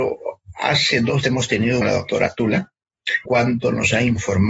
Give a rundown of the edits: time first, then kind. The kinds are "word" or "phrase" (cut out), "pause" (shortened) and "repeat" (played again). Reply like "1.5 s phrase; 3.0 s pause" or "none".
1.2 s word; 1.8 s phrase; 3.3 s word